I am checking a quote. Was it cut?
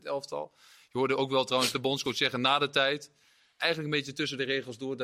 no; 0 cuts

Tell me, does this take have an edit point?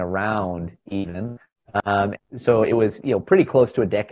yes; 1 cut; at 2.2 s

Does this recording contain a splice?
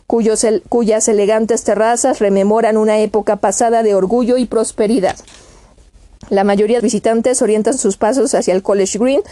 yes; 1 cut; at 6.8 s

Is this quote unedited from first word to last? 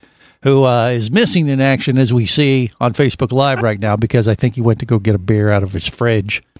yes; 0 cuts

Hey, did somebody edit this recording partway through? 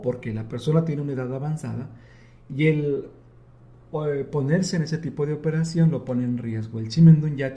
no; 0 cuts

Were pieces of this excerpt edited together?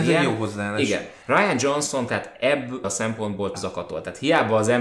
yes; 4 cuts; at 1.2 s, 2.1 s, 2.8 s, 3.5 s

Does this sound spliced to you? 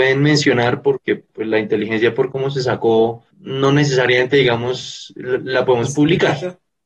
yes; 1 cut; at 3.3 s

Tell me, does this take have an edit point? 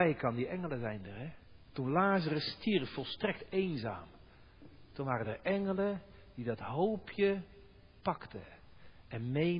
no; 0 cuts

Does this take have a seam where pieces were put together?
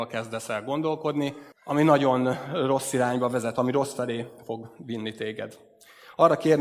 yes; 1 cut; at 1.5 s

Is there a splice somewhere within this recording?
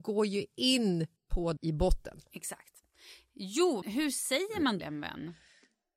yes; 4 cuts; at 1.2 s, 1.6 s, 3.8 s, 4.8 s

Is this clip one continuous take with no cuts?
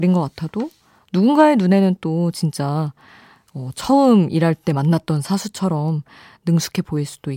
yes; 0 cuts

